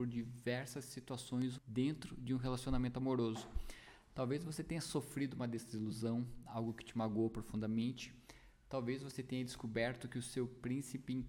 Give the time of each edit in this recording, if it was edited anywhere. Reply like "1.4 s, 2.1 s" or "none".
1.6 s

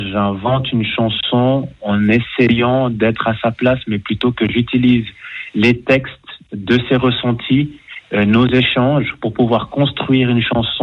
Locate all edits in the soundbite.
none

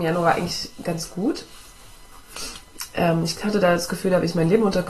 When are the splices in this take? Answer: none

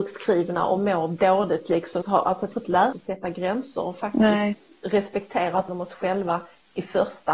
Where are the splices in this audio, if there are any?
2.0 s, 2.5 s, 2.9 s, 5.7 s

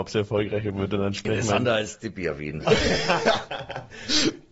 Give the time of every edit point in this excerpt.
none

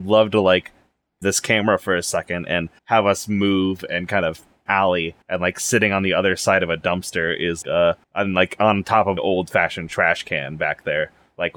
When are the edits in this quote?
1.2 s, 2.8 s, 4.7 s, 5.2 s, 7.6 s, 8.0 s, 9.2 s

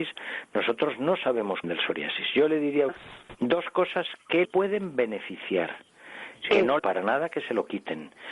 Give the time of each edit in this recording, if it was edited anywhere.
1.6 s, 2.9 s, 4.4 s, 6.8 s

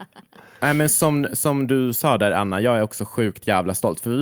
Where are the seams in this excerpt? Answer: none

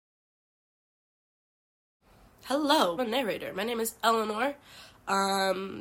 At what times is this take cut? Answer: 3.0 s

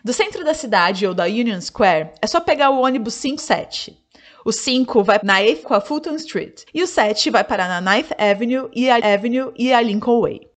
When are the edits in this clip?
3.4 s, 5.2 s, 5.6 s, 6.7 s, 9.0 s

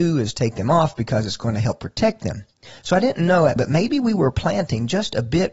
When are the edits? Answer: 3.6 s

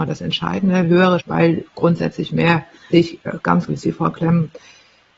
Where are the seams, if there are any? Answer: 1.2 s, 1.7 s, 2.9 s, 3.7 s

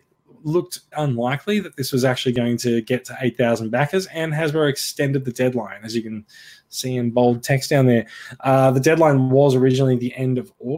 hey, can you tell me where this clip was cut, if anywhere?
0.9 s

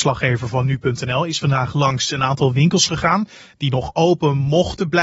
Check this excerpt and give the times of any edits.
none

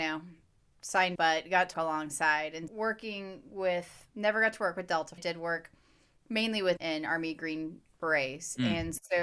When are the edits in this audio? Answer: 1.2 s, 1.7 s, 2.7 s, 4.1 s, 5.2 s, 6.8 s

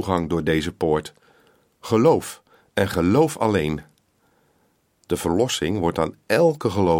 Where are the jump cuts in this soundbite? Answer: none

